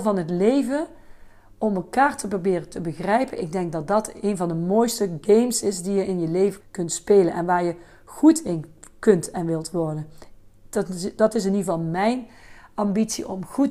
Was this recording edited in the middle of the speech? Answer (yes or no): yes